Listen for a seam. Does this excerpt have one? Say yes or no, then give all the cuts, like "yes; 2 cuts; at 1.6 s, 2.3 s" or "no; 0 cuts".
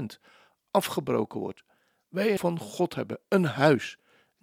yes; 1 cut; at 2.4 s